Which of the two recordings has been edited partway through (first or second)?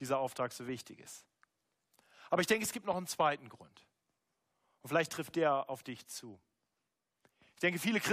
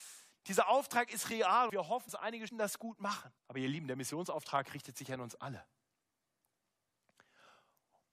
second